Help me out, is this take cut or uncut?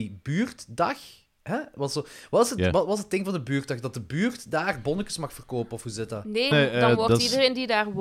cut